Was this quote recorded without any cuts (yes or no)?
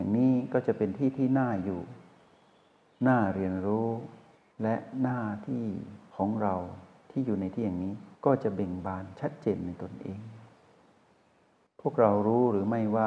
no